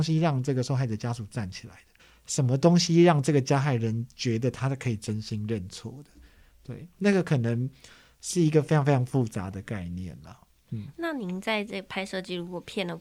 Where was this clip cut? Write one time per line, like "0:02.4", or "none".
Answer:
0:02.0

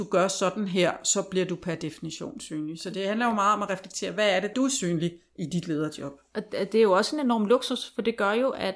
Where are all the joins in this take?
0:04.5

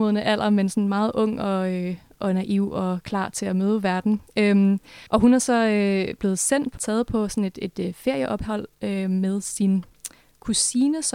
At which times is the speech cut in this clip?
0:05.1
0:06.8

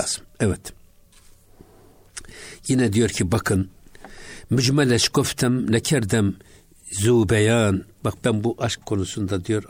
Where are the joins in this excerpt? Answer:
none

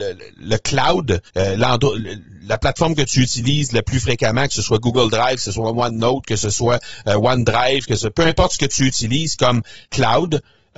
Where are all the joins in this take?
0:01.3
0:09.8

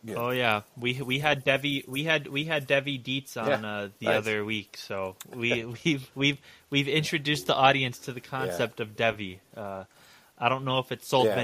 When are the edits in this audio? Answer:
none

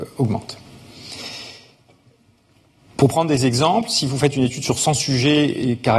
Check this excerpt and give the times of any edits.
none

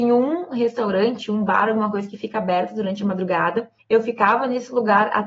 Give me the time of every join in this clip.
0:03.8

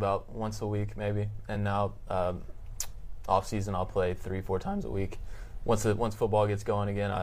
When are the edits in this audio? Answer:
none

